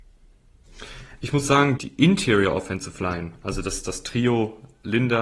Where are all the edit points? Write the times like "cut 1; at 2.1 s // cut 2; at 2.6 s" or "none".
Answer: cut 1; at 1.8 s